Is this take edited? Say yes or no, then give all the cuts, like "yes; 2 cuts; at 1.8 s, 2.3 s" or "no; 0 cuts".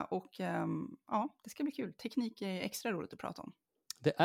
no; 0 cuts